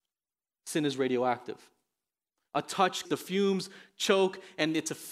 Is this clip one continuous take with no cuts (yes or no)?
no